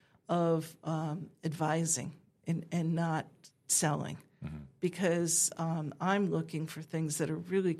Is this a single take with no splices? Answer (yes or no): yes